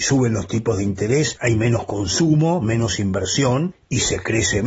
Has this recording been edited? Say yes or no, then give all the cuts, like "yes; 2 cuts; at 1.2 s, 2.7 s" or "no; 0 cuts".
no; 0 cuts